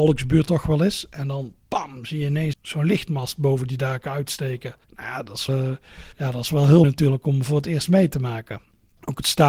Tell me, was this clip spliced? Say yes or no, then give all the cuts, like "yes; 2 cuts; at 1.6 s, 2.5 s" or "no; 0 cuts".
yes; 5 cuts; at 2.5 s, 4.8 s, 5.5 s, 6.1 s, 6.8 s